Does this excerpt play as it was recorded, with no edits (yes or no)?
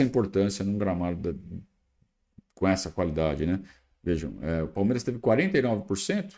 yes